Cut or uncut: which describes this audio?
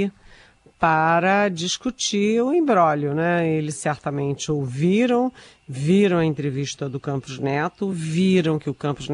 uncut